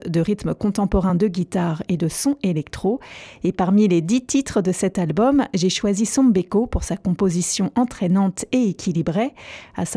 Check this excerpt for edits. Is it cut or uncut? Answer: uncut